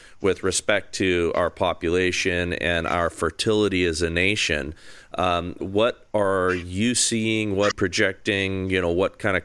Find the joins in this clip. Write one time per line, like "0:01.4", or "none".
0:05.6
0:07.7